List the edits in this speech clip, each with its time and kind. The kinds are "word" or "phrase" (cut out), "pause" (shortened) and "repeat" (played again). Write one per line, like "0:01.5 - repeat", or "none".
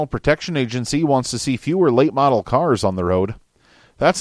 none